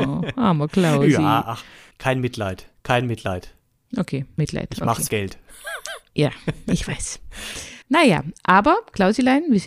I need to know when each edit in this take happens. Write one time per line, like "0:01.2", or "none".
0:01.9
0:04.4
0:05.1
0:07.8